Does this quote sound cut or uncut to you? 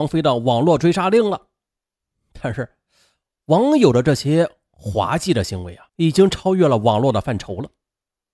cut